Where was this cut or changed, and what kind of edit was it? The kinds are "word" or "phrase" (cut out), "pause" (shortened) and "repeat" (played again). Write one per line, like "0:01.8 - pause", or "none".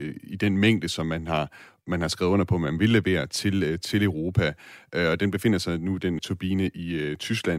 0:06.2 - word